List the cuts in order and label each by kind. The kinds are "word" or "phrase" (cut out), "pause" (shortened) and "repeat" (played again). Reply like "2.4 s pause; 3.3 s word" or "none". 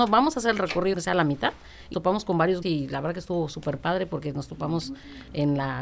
0.9 s word; 1.9 s word; 2.6 s word